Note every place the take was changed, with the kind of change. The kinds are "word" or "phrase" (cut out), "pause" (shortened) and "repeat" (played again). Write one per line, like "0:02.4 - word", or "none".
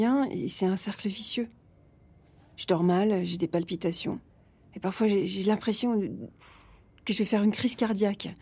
none